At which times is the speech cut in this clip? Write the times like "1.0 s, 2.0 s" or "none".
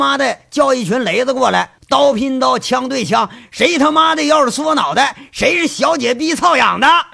1.8 s